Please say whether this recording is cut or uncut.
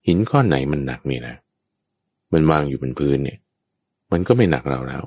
uncut